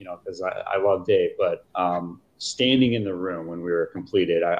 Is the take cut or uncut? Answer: cut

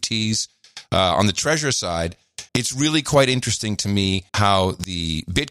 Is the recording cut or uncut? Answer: cut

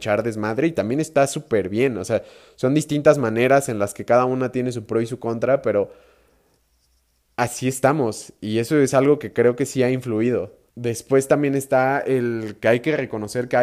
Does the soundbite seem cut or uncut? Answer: cut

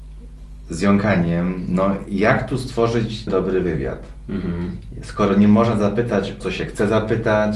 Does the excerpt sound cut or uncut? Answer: cut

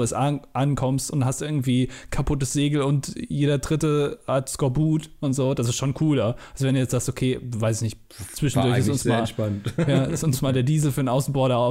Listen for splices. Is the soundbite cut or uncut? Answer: uncut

